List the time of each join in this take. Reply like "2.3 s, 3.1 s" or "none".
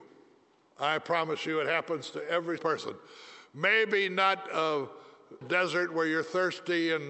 2.6 s, 5.4 s